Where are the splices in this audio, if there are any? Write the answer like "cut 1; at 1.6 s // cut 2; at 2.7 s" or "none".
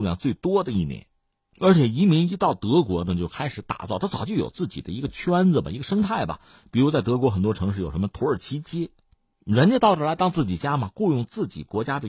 none